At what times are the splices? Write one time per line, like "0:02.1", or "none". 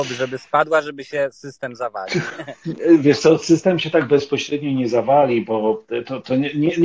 none